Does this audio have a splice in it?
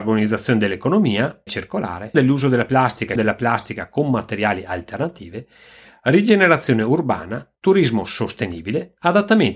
yes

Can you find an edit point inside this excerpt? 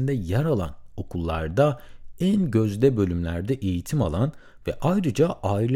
no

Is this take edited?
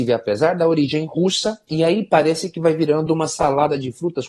no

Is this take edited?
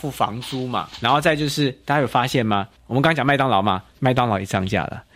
yes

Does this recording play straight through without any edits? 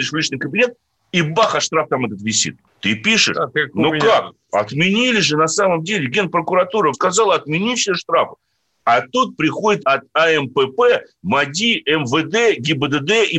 no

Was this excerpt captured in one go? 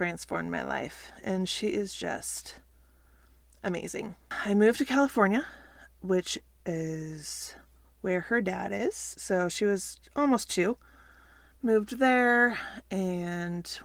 yes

